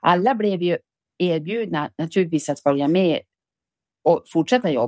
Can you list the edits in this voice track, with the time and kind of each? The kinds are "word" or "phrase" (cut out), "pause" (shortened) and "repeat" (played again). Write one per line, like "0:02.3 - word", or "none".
none